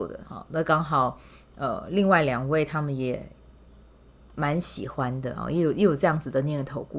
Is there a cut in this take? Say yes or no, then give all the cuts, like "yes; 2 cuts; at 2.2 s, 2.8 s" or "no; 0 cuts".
no; 0 cuts